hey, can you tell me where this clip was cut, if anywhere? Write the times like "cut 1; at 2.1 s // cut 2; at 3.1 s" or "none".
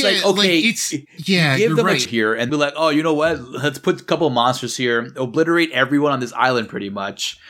cut 1; at 1.1 s // cut 2; at 2.0 s // cut 3; at 2.5 s